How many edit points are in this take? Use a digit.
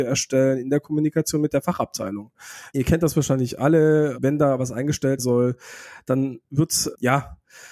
1